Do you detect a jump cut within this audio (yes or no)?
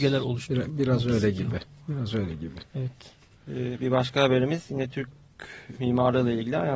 yes